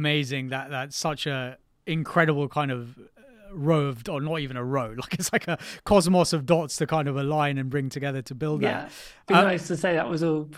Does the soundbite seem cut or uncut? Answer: uncut